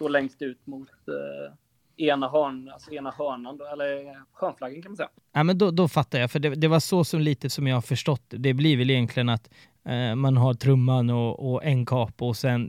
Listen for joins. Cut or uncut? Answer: cut